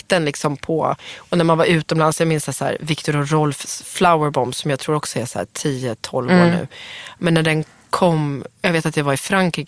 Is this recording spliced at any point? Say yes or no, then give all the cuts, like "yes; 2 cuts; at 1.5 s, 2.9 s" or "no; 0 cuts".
no; 0 cuts